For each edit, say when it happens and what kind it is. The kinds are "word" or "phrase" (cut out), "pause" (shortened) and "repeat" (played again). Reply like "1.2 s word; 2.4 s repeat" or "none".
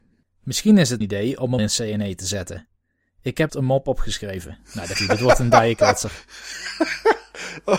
1.0 s word; 1.6 s word; 3.5 s word; 5.0 s word